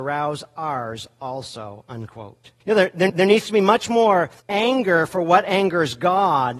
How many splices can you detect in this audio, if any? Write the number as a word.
three